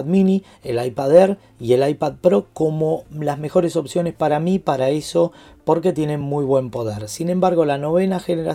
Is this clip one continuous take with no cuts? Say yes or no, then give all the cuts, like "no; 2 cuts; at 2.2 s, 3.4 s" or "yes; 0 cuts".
yes; 0 cuts